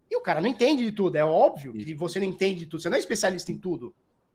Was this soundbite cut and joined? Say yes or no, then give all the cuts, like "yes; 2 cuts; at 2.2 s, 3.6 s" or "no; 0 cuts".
no; 0 cuts